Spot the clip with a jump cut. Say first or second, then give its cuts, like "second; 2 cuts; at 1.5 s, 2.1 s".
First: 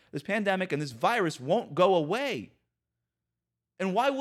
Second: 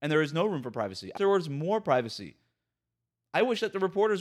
second; 1 cut; at 1.2 s